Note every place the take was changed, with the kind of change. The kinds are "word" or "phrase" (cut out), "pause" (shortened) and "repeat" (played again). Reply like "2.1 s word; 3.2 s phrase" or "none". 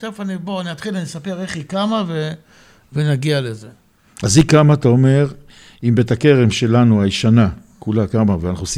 none